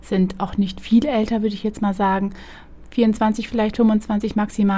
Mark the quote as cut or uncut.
uncut